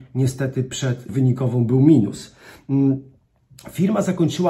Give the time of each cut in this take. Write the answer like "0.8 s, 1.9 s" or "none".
1.1 s